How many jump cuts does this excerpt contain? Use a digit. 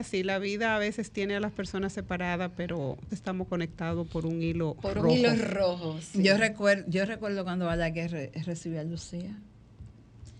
1